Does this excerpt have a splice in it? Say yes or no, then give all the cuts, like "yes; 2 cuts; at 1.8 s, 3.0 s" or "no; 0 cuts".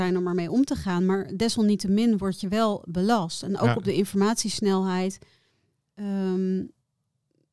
no; 0 cuts